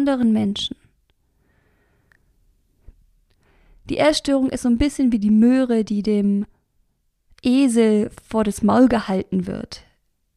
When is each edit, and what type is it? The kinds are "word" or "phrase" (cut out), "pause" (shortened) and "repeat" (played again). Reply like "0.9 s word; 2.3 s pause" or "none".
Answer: none